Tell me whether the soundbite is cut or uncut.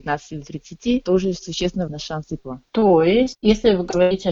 cut